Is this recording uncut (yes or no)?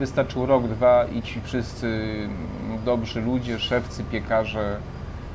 yes